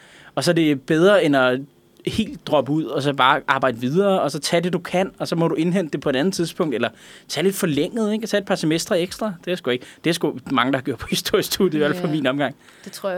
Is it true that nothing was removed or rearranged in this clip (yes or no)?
yes